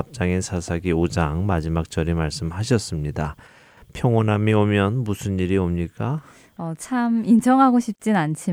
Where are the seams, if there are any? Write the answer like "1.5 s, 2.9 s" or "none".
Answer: none